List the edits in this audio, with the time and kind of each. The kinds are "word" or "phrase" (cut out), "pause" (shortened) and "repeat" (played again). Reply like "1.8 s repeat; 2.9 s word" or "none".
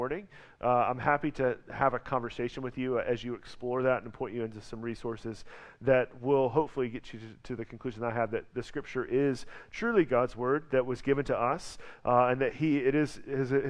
none